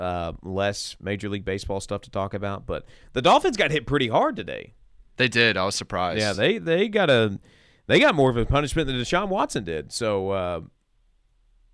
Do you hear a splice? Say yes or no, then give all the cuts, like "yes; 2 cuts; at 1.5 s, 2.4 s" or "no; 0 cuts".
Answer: no; 0 cuts